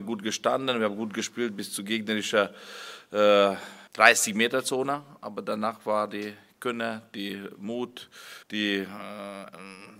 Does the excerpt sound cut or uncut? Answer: cut